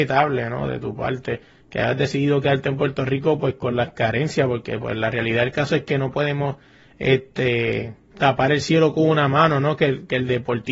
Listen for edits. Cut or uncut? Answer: uncut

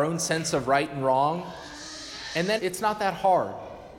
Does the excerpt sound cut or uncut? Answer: cut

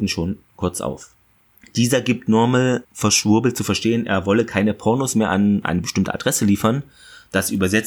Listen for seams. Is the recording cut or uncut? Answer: uncut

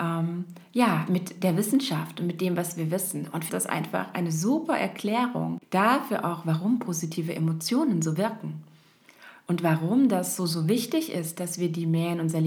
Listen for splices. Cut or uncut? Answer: cut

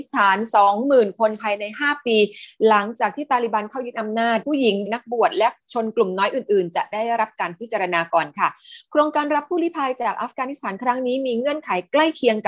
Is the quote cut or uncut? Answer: cut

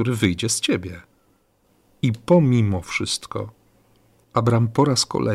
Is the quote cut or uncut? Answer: uncut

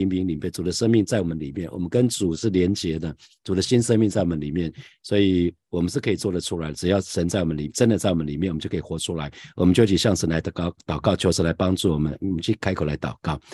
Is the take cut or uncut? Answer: uncut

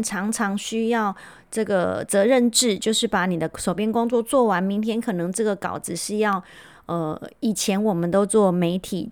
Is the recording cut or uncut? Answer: uncut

